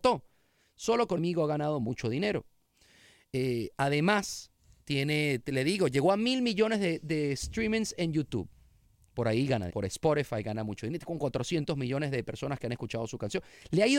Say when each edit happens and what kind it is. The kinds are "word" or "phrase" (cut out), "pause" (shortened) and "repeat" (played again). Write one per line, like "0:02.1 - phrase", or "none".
0:01.2 - phrase
0:07.0 - word
0:09.7 - word